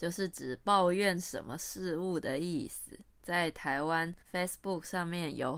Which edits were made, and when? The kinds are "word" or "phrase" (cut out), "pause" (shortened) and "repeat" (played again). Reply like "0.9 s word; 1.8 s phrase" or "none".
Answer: 3.1 s pause; 4.2 s pause